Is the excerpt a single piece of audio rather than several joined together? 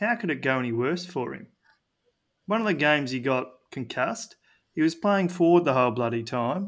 yes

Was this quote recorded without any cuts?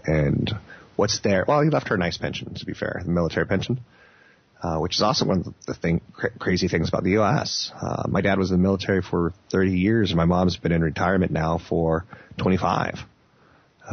yes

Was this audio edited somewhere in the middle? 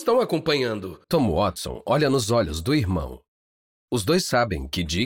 yes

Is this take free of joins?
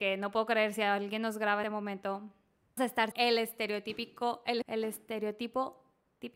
no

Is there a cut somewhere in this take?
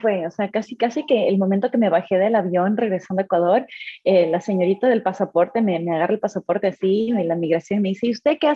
no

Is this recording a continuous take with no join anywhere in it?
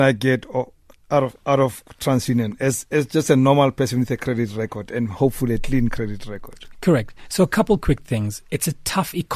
yes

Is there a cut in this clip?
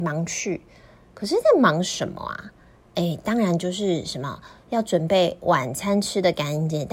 no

